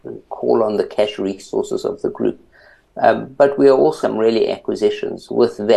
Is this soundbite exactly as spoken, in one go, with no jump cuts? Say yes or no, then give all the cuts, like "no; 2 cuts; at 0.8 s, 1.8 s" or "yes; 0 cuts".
no; 2 cuts; at 4.0 s, 4.5 s